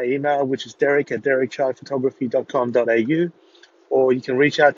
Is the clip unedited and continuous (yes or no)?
yes